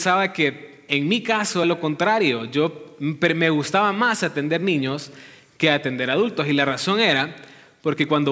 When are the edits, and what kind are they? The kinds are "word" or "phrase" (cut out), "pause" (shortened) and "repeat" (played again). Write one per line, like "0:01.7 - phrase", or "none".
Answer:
0:01.6 - word